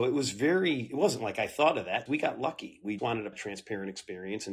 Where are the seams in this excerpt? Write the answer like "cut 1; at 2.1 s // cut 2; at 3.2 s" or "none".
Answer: cut 1; at 2.1 s // cut 2; at 3.0 s // cut 3; at 3.3 s